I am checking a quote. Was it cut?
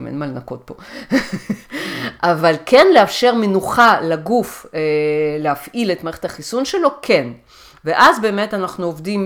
no; 0 cuts

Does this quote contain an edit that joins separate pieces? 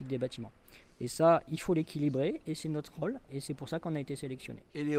no; 0 cuts

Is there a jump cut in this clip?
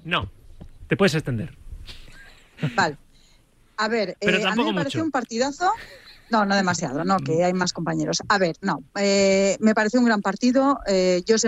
no; 0 cuts

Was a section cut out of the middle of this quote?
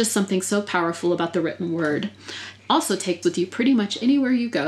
yes; 2 cuts; at 2.6 s, 3.2 s

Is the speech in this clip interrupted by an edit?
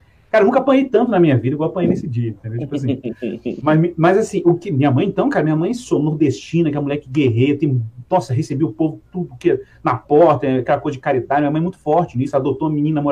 no; 0 cuts

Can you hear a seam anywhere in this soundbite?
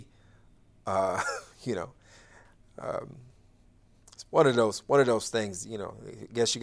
no; 0 cuts

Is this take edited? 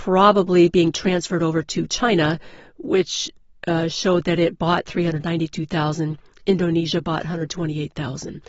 no; 0 cuts

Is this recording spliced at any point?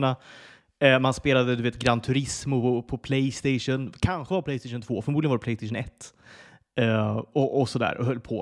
no; 0 cuts

